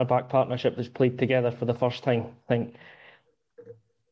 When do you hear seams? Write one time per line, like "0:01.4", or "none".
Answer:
0:02.4